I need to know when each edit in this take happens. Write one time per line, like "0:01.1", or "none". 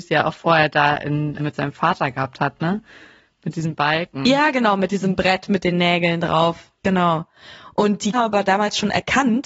0:01.4
0:08.1